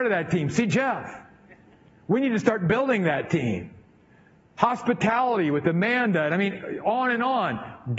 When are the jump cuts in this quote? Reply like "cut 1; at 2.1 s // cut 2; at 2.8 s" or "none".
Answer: none

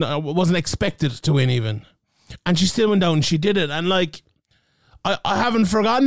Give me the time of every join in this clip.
none

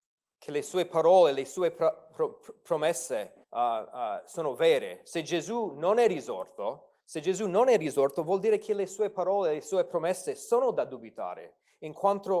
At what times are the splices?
cut 1; at 3.4 s // cut 2; at 7.0 s

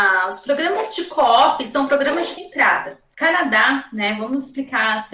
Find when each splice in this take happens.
cut 1; at 2.4 s

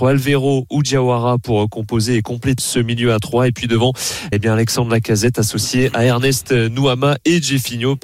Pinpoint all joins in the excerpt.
cut 1; at 2.6 s // cut 2; at 4.3 s

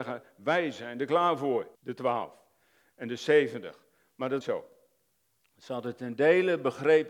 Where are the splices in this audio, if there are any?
cut 1; at 1.7 s // cut 2; at 4.4 s

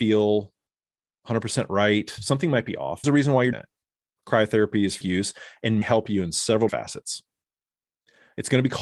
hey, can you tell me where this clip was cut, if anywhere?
cut 1; at 3.0 s // cut 2; at 3.5 s // cut 3; at 5.0 s // cut 4; at 5.8 s // cut 5; at 6.7 s

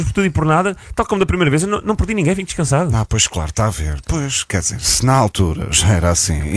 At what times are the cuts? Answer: none

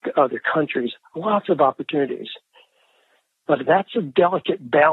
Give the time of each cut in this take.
none

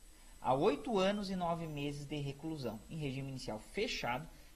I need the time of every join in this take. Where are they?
none

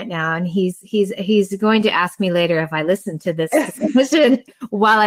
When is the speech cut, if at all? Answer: none

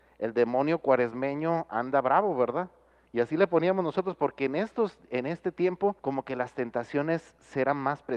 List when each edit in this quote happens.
cut 1; at 6.0 s

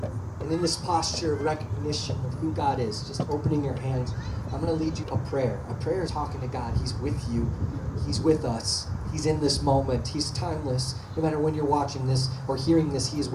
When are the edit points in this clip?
cut 1; at 5.0 s // cut 2; at 6.1 s

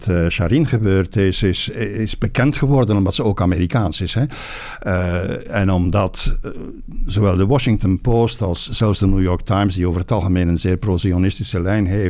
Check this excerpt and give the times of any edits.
cut 1; at 1.7 s

